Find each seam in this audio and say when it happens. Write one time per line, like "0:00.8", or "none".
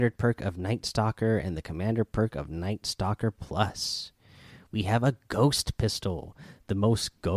none